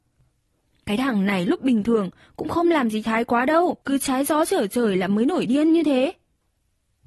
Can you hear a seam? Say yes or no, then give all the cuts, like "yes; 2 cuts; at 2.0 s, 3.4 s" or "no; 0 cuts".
yes; 1 cut; at 3.8 s